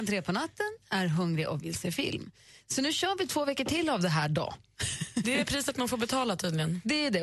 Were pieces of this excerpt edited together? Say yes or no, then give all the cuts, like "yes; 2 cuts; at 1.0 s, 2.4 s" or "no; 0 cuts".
no; 0 cuts